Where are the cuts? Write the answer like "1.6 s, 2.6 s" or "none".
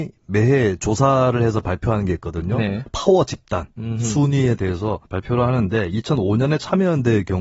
5.0 s

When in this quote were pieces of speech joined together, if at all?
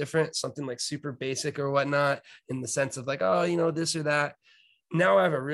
none

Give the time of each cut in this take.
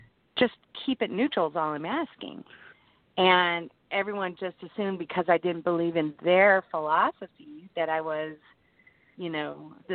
none

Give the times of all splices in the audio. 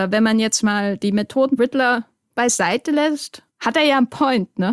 1.6 s, 3.5 s

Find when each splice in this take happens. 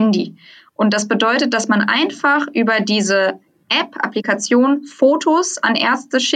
none

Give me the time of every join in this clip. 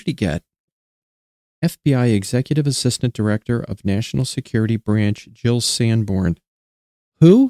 1.2 s

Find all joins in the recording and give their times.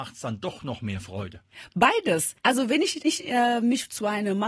3.0 s

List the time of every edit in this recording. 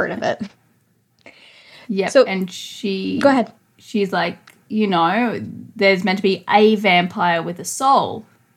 none

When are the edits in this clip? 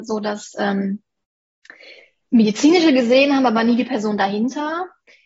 none

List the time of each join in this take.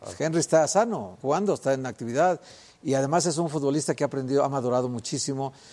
1.2 s

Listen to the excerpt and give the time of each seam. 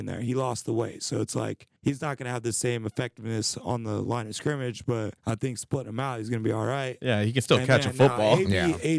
1.8 s, 5.2 s

